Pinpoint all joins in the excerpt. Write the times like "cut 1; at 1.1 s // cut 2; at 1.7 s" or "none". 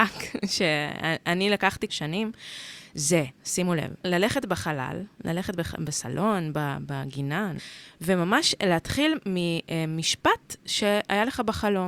cut 1; at 1.9 s // cut 2; at 3.3 s // cut 3; at 4.0 s